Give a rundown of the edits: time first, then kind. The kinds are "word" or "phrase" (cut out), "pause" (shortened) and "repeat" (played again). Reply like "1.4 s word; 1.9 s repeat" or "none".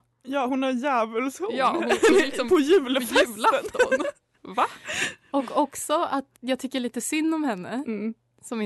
6.4 s pause